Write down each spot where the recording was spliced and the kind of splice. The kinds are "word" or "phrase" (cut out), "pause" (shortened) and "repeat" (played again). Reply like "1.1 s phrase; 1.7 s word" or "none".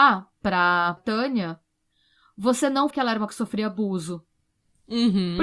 1.0 s word; 2.9 s word; 3.3 s word